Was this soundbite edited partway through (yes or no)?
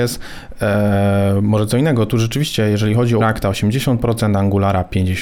yes